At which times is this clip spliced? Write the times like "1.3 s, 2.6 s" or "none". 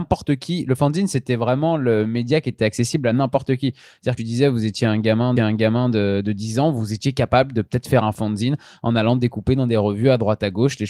4.2 s, 5.4 s